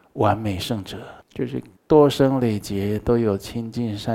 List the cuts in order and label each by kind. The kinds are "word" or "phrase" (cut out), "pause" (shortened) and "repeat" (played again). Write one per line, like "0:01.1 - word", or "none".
0:01.2 - pause
0:01.8 - pause